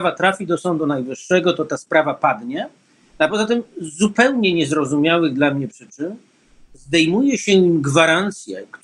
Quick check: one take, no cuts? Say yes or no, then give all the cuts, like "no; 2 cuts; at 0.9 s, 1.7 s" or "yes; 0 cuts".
yes; 0 cuts